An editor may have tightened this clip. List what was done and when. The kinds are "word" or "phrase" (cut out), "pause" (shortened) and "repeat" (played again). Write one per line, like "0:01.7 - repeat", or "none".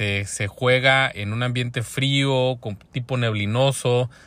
0:01.1 - word